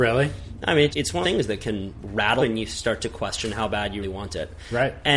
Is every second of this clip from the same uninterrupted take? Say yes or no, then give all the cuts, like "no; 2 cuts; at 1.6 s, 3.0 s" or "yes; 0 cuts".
no; 4 cuts; at 0.9 s, 1.2 s, 2.4 s, 4.0 s